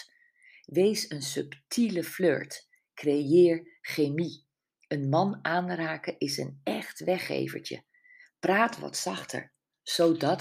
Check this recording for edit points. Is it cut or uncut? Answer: uncut